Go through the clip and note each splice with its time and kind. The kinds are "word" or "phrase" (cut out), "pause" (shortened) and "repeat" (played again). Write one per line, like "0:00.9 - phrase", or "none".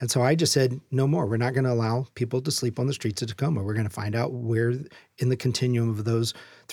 none